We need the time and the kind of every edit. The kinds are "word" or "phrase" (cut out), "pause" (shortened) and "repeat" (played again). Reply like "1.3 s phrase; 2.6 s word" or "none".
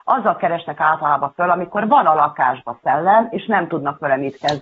none

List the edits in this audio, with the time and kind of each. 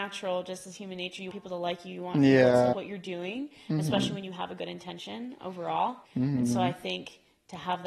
1.3 s word; 2.7 s word; 6.0 s pause

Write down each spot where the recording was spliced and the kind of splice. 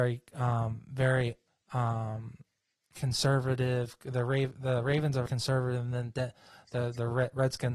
1.5 s pause; 5.3 s word

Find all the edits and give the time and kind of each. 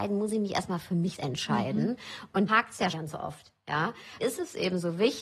1.2 s word; 2.5 s word; 2.9 s word; 4.2 s word

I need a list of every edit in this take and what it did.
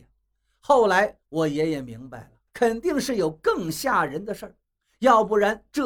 2.5 s pause

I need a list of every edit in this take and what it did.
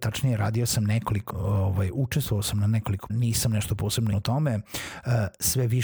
1.3 s word; 3.1 s word; 4.1 s word

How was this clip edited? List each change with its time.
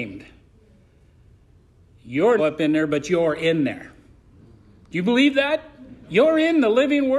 2.4 s phrase

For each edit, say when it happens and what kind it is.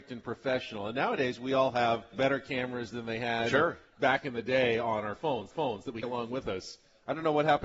2.1 s word; 5.5 s repeat; 6.0 s word

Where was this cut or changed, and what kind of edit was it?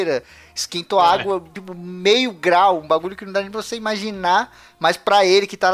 none

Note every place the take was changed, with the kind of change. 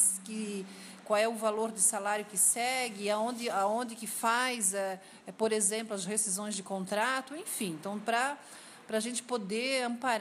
none

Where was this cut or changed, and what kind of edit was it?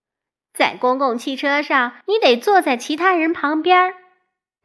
2.0 s pause

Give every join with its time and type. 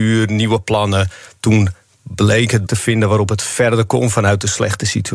2.7 s phrase

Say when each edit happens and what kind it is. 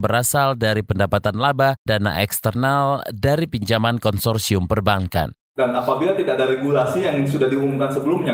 1.9 s word; 5.5 s pause

